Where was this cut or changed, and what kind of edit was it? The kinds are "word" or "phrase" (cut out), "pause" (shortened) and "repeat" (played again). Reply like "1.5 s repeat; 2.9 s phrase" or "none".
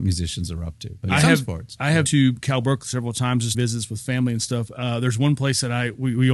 2.1 s word; 3.5 s word